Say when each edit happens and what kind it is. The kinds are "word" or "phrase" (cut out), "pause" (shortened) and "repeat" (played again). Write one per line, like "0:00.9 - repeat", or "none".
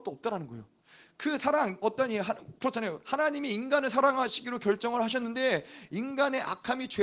0:01.8 - word